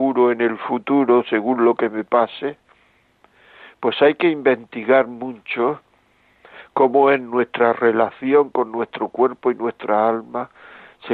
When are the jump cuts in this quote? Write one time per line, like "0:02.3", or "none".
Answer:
none